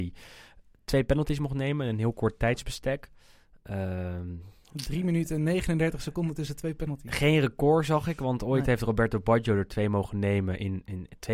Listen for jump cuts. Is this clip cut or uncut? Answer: uncut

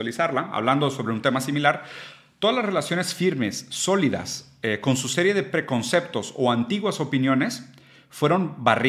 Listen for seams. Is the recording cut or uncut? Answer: uncut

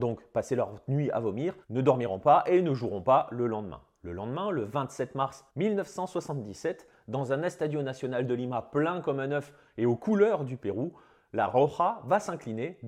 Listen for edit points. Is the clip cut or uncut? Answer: cut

